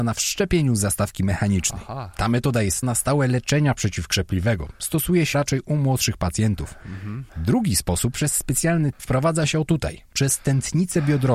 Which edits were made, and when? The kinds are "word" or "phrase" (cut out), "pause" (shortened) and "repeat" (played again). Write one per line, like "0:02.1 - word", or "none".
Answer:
0:02.8 - phrase
0:05.3 - word
0:08.1 - phrase
0:08.9 - phrase